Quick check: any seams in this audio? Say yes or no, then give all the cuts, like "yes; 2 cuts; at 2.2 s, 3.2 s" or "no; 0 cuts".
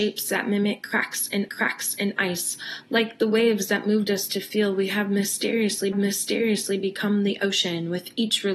yes; 2 cuts; at 1.5 s, 5.9 s